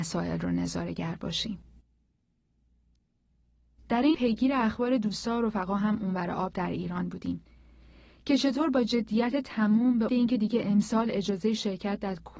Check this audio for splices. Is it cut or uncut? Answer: cut